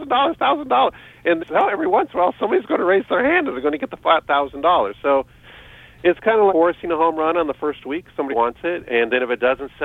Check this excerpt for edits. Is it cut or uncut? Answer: cut